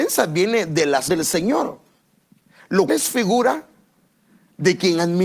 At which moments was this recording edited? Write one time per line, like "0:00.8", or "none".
0:01.1
0:02.9